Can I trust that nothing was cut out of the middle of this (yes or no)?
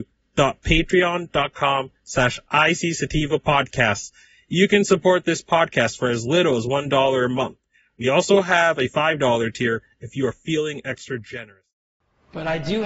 yes